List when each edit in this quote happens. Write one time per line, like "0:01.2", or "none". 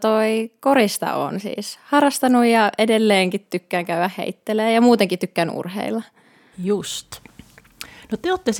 none